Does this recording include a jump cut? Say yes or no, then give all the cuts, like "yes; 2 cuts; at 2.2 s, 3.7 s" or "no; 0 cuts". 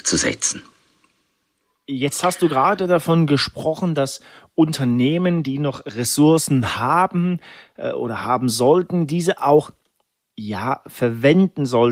no; 0 cuts